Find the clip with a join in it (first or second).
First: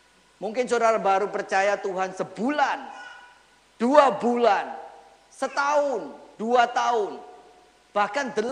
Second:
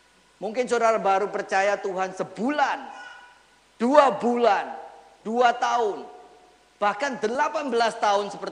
second